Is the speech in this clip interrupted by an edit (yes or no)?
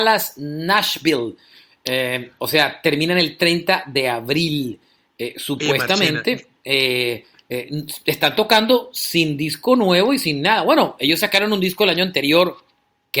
no